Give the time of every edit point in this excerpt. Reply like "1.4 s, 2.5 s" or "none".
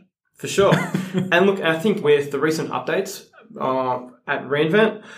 2.0 s